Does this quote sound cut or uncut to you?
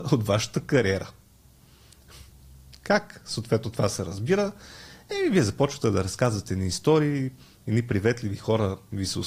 uncut